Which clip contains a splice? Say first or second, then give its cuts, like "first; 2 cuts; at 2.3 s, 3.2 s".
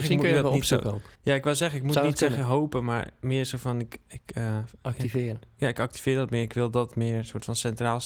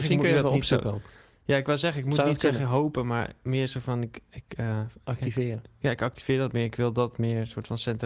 first; 1 cut; at 1.1 s